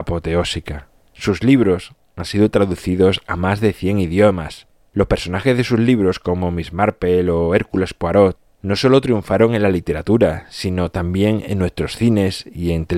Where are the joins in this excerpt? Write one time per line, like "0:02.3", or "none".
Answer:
none

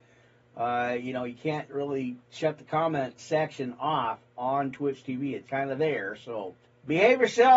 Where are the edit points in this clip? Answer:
0:03.2
0:05.5
0:06.6

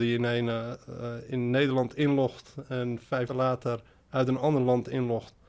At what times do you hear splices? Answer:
0:03.3

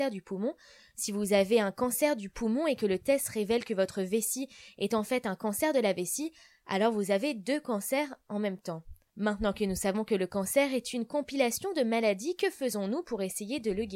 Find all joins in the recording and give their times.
none

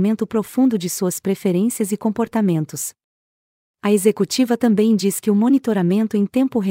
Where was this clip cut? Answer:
none

